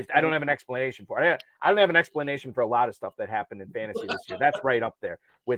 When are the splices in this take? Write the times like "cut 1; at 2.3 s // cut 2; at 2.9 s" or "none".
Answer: none